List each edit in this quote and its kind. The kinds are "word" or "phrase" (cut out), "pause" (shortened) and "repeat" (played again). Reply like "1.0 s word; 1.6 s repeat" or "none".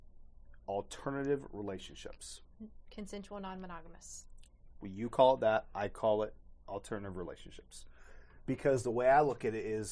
none